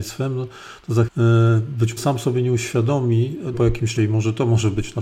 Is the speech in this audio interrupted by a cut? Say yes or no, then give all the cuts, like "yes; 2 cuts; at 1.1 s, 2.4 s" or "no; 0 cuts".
yes; 4 cuts; at 1.1 s, 2.0 s, 3.5 s, 4.0 s